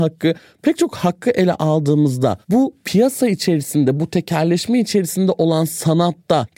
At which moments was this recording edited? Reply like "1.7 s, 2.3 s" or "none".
none